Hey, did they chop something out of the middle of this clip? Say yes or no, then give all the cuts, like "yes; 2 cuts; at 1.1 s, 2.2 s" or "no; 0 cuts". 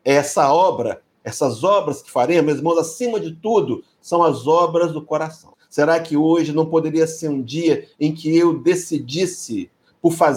no; 0 cuts